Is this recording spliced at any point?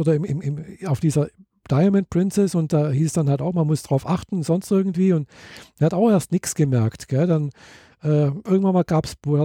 no; 0 cuts

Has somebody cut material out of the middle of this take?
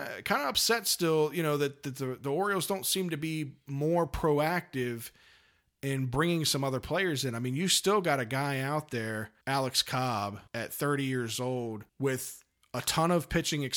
yes; 3 cuts; at 9.4 s, 10.5 s, 11.9 s

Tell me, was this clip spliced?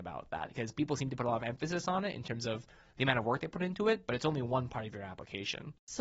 no; 0 cuts

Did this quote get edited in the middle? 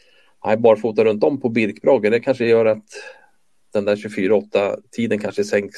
no; 0 cuts

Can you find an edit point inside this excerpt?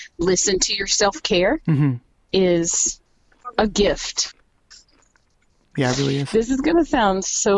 no; 0 cuts

